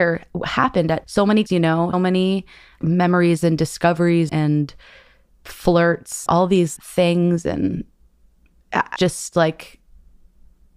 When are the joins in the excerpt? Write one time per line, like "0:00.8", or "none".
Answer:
0:01.0
0:01.5
0:01.9
0:02.8
0:04.3
0:06.3
0:06.8
0:09.0